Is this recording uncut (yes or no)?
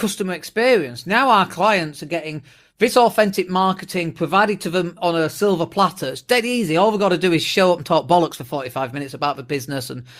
yes